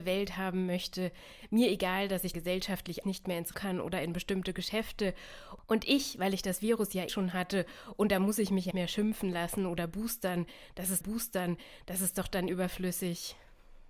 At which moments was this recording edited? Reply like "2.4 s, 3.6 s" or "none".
2.3 s, 3.0 s, 3.5 s, 7.1 s, 8.7 s, 11.0 s, 12.5 s

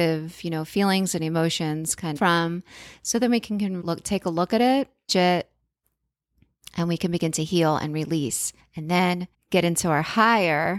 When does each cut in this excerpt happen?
2.2 s, 3.8 s, 5.1 s, 8.6 s, 9.3 s

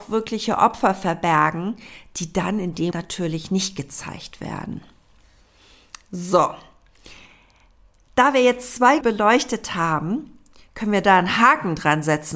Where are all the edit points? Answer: 2.9 s, 9.0 s

